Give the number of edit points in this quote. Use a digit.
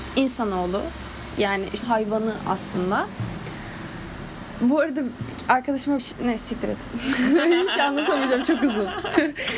2